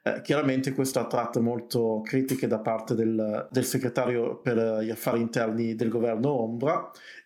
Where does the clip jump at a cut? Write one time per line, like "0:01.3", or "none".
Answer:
none

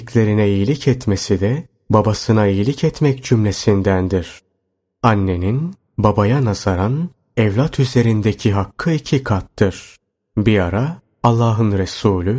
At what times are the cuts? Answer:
none

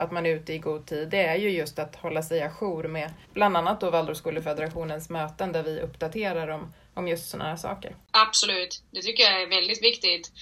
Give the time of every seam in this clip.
0:03.2

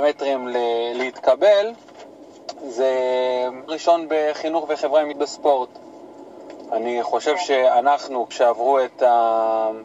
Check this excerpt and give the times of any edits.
0:03.7
0:05.1
0:08.3

